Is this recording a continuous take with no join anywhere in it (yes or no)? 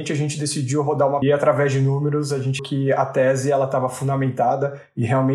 no